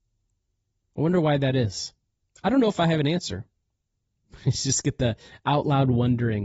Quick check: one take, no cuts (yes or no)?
yes